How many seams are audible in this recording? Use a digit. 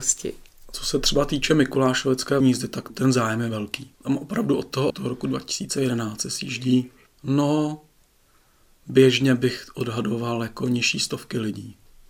5